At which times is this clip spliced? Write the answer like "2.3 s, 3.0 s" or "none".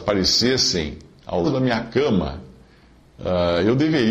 1.4 s